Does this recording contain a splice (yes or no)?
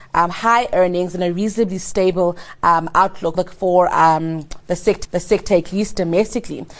yes